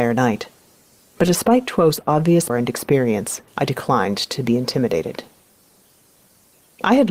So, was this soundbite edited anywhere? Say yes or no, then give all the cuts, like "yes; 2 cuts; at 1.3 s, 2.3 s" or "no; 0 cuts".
yes; 2 cuts; at 2.5 s, 3.5 s